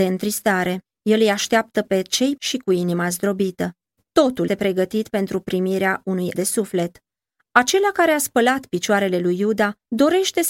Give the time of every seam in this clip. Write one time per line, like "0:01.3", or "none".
0:02.4
0:04.5
0:06.3